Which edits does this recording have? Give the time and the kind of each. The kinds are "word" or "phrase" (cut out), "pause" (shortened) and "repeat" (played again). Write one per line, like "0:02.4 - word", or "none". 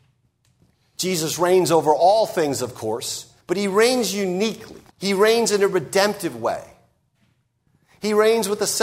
0:03.4 - pause
0:04.9 - pause